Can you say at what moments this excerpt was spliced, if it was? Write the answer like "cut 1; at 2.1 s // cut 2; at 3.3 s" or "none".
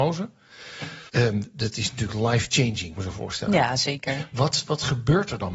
cut 1; at 1.1 s // cut 2; at 3.0 s